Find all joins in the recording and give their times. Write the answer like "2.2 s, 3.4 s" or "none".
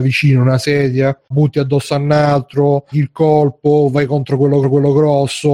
1.3 s, 2.9 s, 4.6 s